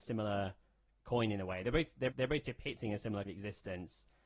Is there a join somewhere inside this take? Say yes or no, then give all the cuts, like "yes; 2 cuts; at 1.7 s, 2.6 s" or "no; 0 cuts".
yes; 2 cuts; at 2.1 s, 3.2 s